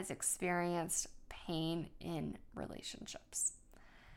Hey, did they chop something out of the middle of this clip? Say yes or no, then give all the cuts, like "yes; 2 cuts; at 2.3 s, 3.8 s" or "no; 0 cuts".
no; 0 cuts